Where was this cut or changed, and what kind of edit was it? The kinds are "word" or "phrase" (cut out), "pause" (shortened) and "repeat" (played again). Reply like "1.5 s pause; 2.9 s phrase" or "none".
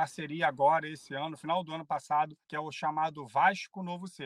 2.4 s pause